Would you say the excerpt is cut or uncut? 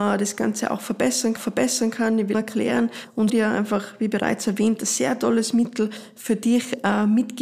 cut